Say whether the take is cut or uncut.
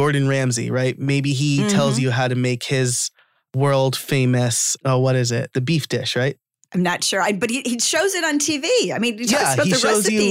uncut